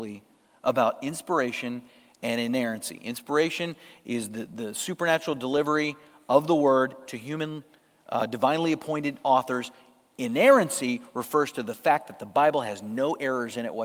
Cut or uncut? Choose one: uncut